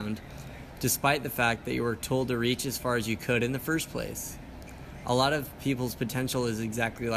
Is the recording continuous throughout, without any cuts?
yes; 0 cuts

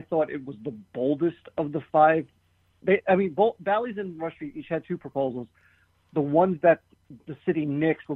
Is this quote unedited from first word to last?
yes; 0 cuts

